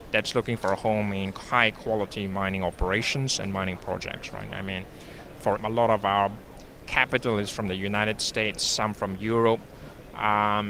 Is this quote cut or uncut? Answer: cut